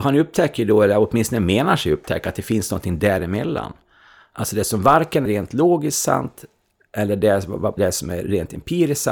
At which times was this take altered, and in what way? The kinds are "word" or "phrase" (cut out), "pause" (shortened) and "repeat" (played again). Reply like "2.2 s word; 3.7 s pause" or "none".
5.3 s word; 7.8 s word